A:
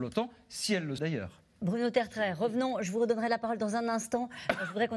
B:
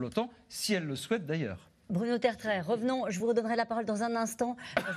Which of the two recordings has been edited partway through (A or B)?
A